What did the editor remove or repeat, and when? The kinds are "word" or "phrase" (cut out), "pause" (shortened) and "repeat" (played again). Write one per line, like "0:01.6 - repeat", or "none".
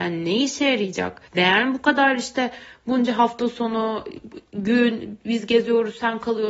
0:01.3 - pause